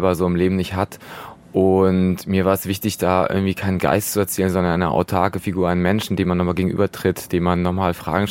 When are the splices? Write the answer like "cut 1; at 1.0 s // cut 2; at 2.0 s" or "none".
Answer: none